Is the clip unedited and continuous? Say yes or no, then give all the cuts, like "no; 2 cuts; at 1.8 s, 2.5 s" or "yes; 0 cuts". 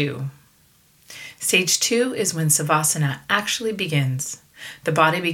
yes; 0 cuts